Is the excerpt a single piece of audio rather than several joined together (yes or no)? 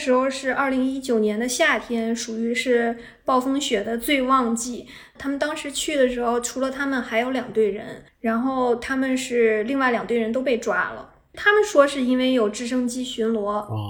no